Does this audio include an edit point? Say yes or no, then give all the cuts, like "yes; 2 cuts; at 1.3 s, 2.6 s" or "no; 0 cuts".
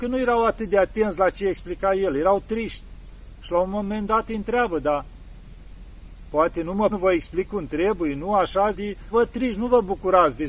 yes; 3 cuts; at 6.9 s, 8.7 s, 9.1 s